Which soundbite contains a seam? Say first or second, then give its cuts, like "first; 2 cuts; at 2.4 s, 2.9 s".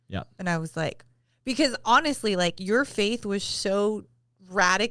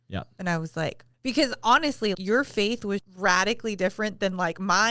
second; 3 cuts; at 1.1 s, 2.1 s, 3.0 s